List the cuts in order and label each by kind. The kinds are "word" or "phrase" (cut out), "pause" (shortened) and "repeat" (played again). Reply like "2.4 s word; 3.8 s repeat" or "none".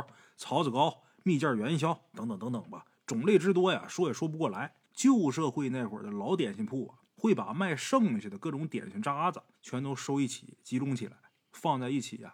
2.1 s word; 4.8 s pause; 7.1 s pause; 9.5 s pause

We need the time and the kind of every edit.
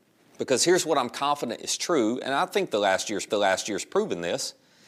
3.3 s repeat

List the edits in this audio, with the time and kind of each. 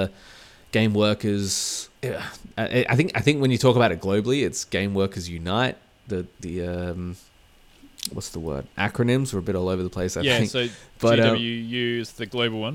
2.0 s pause; 6.3 s pause

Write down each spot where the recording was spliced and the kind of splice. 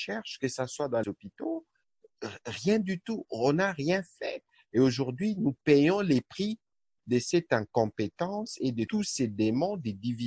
1.0 s word

